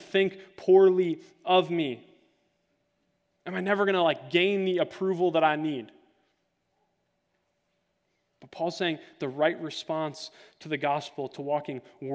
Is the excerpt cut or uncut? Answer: uncut